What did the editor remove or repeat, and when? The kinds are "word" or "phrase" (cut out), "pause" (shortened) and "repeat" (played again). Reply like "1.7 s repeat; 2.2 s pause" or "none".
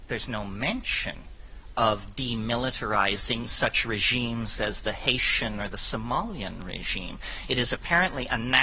3.4 s word